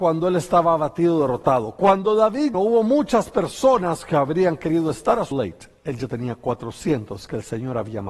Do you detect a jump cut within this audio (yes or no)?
yes